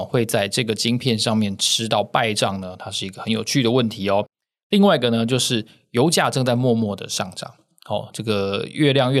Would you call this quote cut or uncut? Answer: uncut